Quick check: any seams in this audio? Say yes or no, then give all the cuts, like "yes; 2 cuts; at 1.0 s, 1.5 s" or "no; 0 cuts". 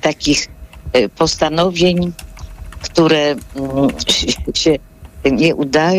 yes; 1 cut; at 4.5 s